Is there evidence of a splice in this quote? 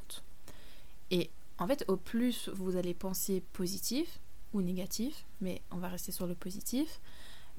no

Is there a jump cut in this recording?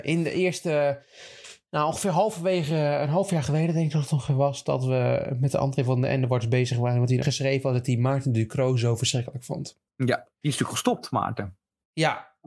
yes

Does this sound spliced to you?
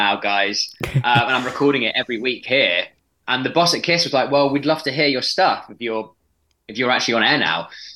no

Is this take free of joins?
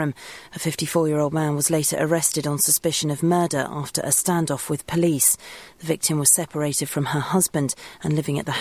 yes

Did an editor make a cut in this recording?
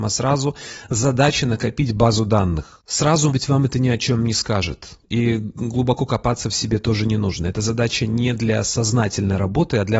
yes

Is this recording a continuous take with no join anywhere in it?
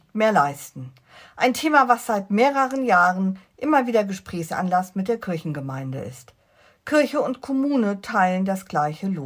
yes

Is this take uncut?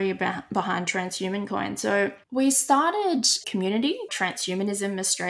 no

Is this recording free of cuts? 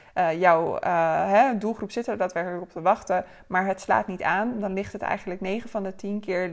yes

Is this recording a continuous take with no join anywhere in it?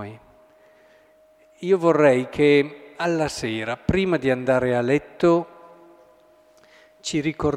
yes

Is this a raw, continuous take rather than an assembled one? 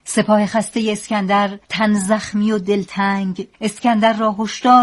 no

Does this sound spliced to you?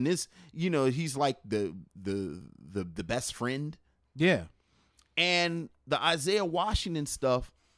no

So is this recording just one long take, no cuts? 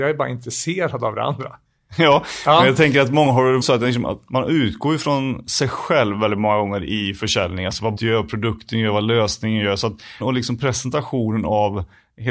no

